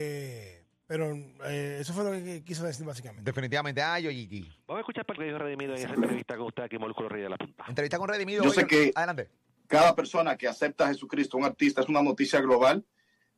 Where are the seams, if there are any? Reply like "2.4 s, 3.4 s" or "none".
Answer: 5.2 s